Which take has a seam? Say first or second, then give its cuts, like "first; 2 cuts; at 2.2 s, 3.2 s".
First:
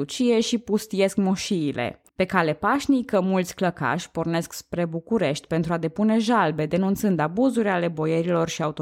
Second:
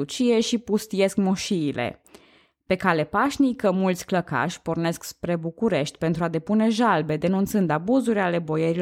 first; 1 cut; at 2.1 s